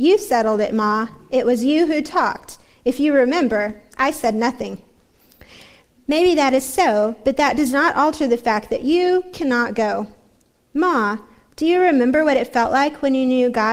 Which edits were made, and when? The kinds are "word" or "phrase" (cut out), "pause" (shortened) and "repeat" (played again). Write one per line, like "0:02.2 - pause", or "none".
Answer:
none